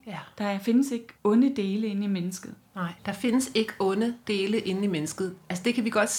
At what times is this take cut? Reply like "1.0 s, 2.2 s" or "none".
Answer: 1.1 s, 3.0 s, 4.2 s